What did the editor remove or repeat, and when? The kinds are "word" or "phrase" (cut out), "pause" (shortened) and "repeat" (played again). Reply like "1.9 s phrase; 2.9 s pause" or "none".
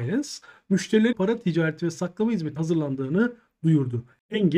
1.1 s phrase; 2.6 s word